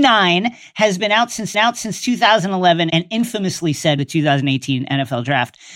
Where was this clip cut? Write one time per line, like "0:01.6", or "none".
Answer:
0:01.5
0:04.0